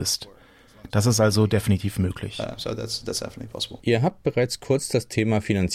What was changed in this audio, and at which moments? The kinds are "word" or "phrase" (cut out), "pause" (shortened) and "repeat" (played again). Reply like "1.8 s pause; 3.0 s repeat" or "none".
3.8 s pause